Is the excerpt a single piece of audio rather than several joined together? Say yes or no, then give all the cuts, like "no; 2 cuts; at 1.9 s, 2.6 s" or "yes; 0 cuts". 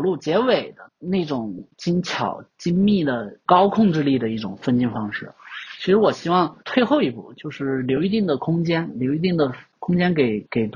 no; 2 cuts; at 2.5 s, 6.6 s